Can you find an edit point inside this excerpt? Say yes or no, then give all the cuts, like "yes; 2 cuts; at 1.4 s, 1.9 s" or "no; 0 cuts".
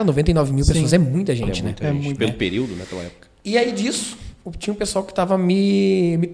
no; 0 cuts